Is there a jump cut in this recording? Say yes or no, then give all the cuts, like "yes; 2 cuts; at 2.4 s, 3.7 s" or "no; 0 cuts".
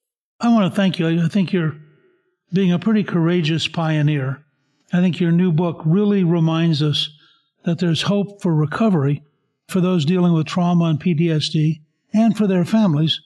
no; 0 cuts